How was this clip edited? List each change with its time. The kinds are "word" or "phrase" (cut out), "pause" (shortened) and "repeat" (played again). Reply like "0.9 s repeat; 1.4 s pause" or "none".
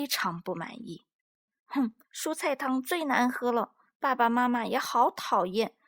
2.0 s pause